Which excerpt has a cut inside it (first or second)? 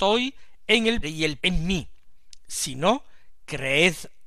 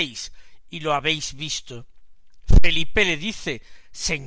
first